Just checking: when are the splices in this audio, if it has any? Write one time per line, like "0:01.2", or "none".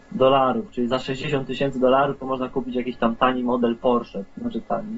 none